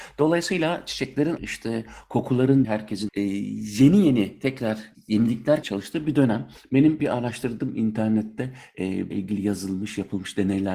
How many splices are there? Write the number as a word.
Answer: six